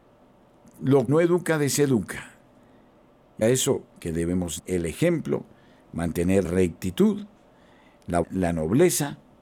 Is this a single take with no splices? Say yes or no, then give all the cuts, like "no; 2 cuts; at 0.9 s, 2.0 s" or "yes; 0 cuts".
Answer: no; 5 cuts; at 1.1 s, 3.4 s, 4.6 s, 6.4 s, 8.2 s